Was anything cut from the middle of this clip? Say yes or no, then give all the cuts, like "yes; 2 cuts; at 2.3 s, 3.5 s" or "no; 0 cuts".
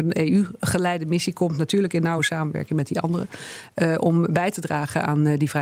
no; 0 cuts